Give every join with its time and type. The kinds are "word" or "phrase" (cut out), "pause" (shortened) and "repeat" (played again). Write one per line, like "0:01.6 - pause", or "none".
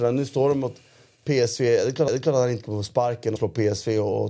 0:02.1 - repeat
0:03.4 - word